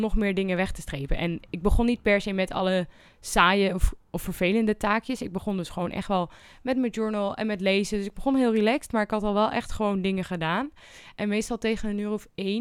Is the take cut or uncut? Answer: uncut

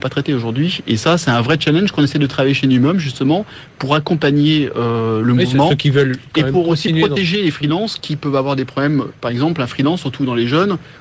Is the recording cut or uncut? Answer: uncut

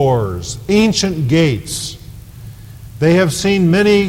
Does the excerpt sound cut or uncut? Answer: uncut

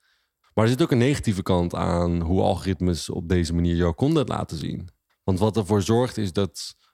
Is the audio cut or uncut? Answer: cut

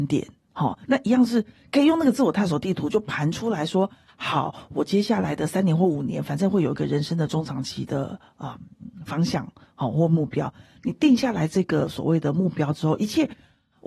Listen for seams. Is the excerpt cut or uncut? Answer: uncut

